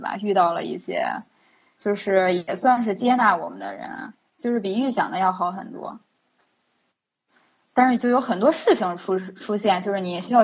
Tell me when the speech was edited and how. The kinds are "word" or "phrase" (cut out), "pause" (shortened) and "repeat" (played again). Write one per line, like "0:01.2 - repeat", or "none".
none